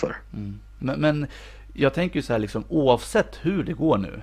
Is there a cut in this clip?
no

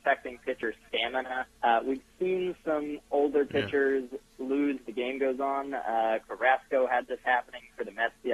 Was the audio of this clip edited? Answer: yes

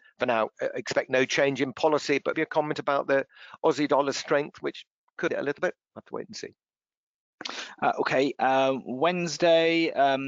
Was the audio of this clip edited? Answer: yes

